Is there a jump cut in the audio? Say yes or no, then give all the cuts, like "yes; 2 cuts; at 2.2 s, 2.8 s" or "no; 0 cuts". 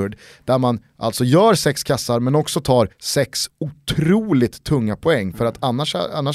yes; 1 cut; at 2.9 s